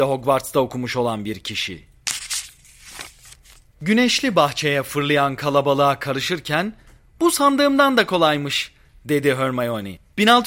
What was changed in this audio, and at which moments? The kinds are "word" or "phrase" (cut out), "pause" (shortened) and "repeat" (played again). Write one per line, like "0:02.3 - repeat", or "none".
none